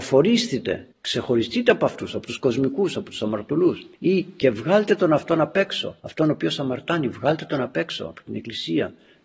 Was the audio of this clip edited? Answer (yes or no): yes